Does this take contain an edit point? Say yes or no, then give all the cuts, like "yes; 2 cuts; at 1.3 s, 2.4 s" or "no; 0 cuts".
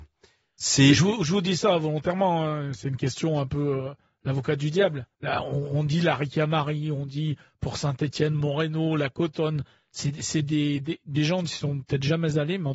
yes; 1 cut; at 5.1 s